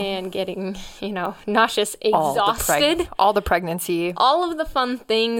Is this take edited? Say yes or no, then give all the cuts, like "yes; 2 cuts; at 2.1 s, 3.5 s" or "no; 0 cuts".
no; 0 cuts